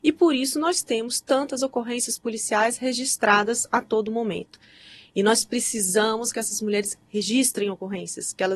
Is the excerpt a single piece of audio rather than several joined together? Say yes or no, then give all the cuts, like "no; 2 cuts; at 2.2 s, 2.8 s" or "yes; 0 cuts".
yes; 0 cuts